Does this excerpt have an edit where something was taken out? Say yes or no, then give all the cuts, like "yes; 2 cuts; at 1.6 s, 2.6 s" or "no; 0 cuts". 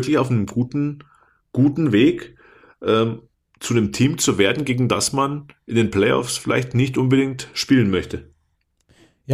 yes; 1 cut; at 3.3 s